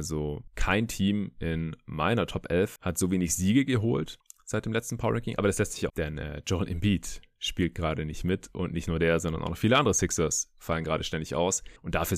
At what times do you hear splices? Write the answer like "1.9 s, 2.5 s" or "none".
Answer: 5.4 s, 5.9 s